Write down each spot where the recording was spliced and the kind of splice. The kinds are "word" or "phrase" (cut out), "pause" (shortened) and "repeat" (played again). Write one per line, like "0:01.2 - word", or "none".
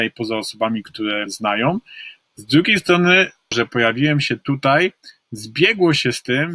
0:01.3 - word
0:03.5 - word